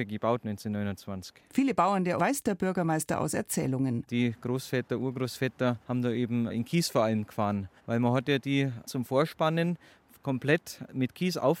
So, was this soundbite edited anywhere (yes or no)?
yes